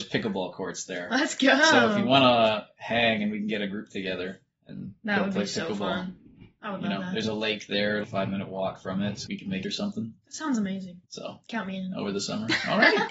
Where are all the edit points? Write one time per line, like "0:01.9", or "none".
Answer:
0:08.0
0:09.3
0:09.6
0:11.0